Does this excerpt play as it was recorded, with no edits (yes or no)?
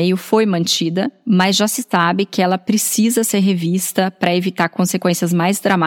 yes